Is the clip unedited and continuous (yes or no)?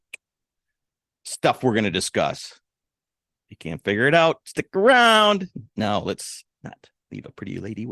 no